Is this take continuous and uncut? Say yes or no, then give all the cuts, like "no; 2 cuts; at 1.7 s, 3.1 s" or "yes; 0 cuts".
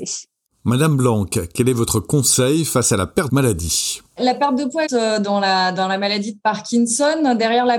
no; 3 cuts; at 3.3 s, 4.1 s, 4.9 s